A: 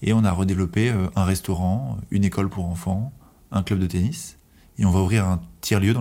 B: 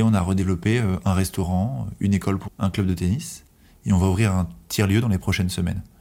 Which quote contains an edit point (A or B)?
B